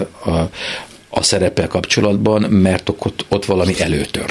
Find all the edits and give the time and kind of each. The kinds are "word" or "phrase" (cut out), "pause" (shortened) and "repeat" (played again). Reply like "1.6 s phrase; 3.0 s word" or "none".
none